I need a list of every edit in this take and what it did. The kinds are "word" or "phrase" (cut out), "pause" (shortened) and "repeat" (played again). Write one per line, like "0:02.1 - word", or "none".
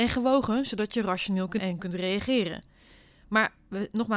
0:01.6 - word